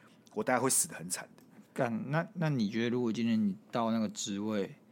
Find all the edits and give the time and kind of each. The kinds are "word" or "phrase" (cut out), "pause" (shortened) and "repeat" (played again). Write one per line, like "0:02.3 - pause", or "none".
none